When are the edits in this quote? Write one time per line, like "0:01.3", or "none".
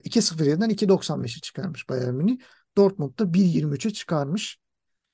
none